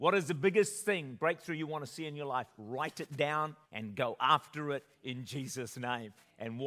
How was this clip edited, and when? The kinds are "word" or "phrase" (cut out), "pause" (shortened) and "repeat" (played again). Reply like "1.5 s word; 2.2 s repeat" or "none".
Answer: 3.6 s pause